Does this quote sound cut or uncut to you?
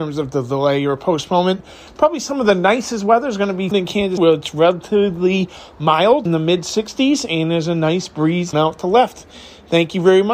cut